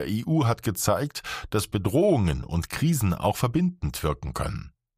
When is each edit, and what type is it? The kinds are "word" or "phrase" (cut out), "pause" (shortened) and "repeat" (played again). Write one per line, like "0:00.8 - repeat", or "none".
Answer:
none